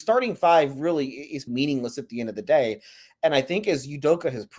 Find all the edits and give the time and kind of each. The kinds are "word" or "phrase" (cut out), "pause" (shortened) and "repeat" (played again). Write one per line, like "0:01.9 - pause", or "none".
0:01.5 - word